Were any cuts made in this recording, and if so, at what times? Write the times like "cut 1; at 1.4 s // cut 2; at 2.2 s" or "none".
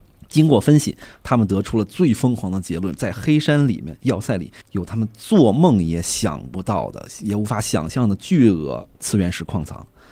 cut 1; at 4.6 s // cut 2; at 8.9 s